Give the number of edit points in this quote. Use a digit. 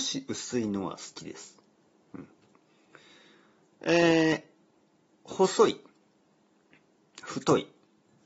0